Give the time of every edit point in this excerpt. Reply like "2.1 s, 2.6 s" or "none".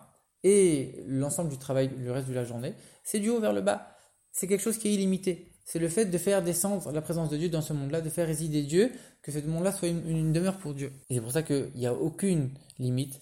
11.0 s